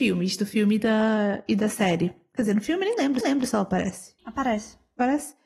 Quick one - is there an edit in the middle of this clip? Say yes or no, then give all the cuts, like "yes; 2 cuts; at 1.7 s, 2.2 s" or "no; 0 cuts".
yes; 2 cuts; at 3.2 s, 4.2 s